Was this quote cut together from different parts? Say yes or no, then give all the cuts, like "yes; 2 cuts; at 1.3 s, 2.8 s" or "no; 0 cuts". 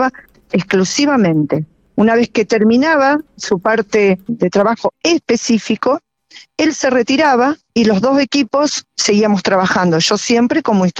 yes; 1 cut; at 4.3 s